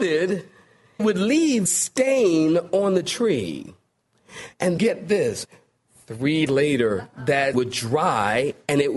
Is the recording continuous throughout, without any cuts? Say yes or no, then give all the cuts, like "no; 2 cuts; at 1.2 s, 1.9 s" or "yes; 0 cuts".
no; 5 cuts; at 1.0 s, 1.7 s, 4.8 s, 6.5 s, 7.5 s